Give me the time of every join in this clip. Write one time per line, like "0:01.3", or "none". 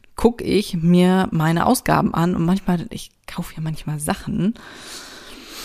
none